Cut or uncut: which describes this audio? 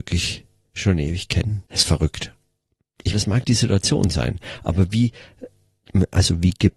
cut